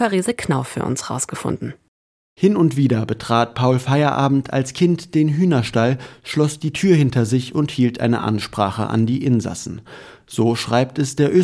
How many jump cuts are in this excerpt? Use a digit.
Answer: 0